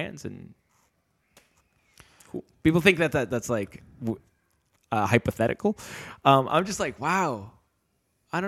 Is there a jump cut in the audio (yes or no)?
no